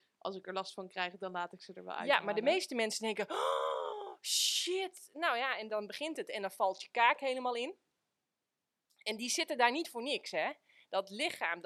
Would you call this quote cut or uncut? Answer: uncut